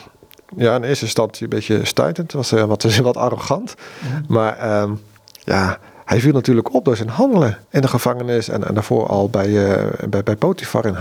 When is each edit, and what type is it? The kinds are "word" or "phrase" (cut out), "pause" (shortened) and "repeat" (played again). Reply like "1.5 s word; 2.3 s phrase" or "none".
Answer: 7.6 s pause